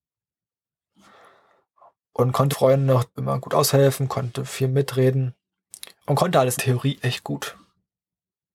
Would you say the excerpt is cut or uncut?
cut